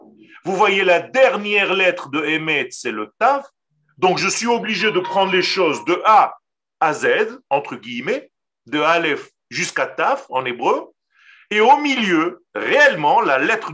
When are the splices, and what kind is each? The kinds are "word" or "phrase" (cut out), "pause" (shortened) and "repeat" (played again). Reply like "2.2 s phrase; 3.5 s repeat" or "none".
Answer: none